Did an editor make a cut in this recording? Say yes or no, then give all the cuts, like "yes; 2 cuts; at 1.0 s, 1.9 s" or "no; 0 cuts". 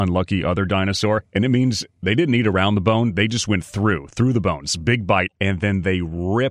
no; 0 cuts